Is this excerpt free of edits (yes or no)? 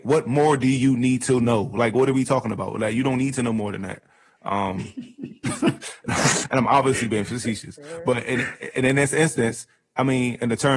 yes